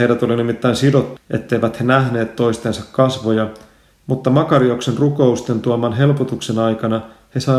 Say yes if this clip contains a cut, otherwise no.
yes